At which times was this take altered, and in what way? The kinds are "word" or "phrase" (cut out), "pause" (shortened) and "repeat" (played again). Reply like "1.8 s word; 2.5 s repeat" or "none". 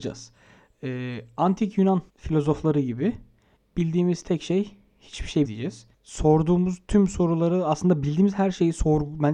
2.1 s pause; 3.6 s pause; 5.4 s word; 5.9 s pause